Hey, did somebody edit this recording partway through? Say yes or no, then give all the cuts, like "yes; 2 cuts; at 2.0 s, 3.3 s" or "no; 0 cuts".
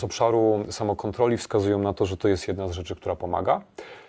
no; 0 cuts